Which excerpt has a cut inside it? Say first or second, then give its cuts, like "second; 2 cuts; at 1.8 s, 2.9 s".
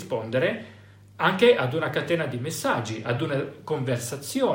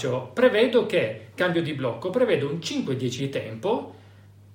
second; 2 cuts; at 1.4 s, 3.2 s